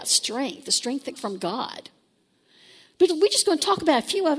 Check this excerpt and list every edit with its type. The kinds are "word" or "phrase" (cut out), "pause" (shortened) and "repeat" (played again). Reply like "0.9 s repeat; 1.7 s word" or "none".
1.2 s word; 3.1 s word

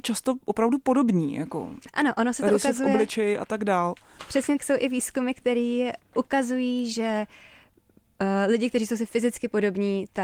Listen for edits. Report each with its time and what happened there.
4.6 s word

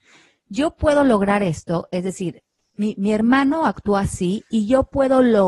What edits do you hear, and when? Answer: none

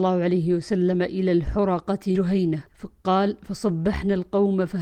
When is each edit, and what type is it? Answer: 2.1 s word; 2.7 s pause

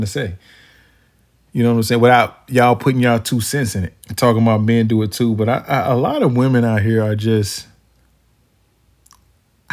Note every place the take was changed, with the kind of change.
4.0 s pause

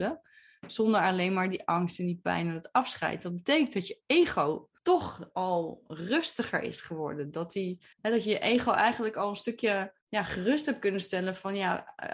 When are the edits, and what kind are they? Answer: 4.8 s pause; 7.9 s pause; 10.0 s pause

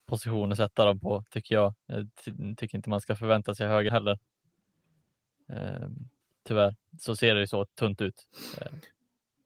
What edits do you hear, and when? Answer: 1.8 s pause; 3.9 s phrase; 6.2 s pause

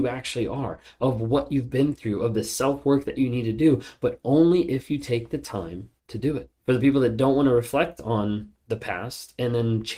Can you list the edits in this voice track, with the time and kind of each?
6.0 s pause; 6.6 s pause

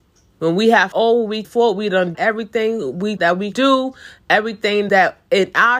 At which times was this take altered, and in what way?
0.9 s word; 1.4 s word; 2.1 s word; 3.2 s word; 3.5 s word; 4.9 s word

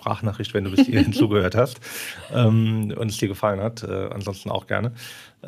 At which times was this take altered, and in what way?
none

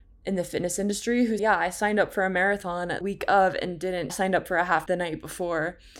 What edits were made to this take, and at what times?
1.4 s word; 3.0 s word; 4.1 s phrase; 4.9 s word

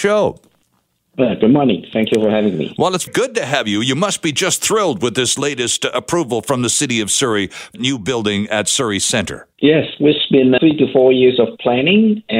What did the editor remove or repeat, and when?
3.1 s word; 7.7 s phrase; 9.5 s pause; 10.6 s word

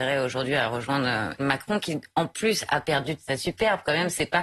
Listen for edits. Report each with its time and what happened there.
1.4 s word

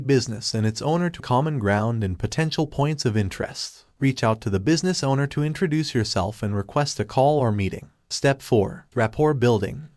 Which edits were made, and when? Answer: 1.2 s word

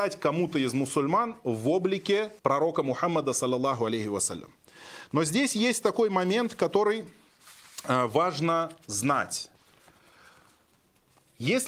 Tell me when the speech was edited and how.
2.4 s pause

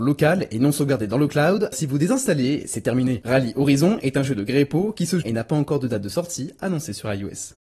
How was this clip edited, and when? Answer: 1.7 s word; 5.2 s phrase

